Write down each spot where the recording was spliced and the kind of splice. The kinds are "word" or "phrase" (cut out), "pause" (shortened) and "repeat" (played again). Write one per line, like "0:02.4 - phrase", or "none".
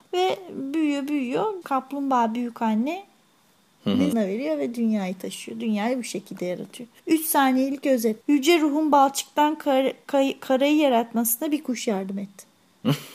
0:01.6 - phrase
0:04.1 - word
0:07.0 - pause
0:08.2 - pause